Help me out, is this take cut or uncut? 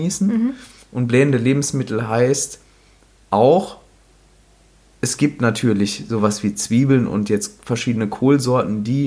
uncut